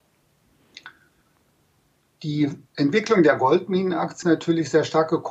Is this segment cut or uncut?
cut